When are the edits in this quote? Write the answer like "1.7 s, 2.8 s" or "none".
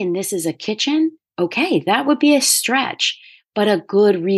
none